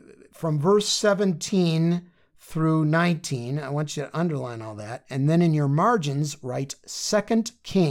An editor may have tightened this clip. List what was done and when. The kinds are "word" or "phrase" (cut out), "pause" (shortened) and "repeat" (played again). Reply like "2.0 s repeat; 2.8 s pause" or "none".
none